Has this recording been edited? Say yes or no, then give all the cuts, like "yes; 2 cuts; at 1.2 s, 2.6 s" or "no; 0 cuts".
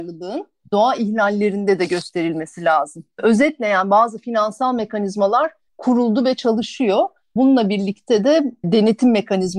no; 0 cuts